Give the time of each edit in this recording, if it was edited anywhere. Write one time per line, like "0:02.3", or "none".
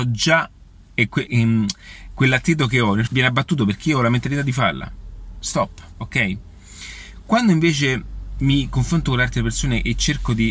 0:01.3
0:03.1